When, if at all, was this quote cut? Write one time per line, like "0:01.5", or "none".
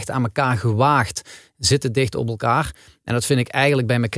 none